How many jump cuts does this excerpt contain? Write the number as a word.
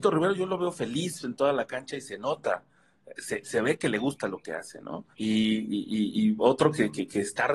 one